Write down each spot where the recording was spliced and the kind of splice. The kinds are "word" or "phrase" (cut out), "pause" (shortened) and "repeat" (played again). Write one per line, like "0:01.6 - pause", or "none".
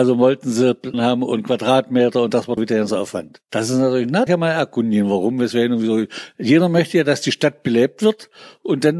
0:00.9 - word
0:02.6 - word
0:04.3 - phrase